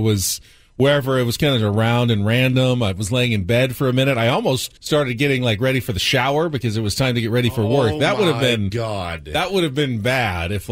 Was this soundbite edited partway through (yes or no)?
yes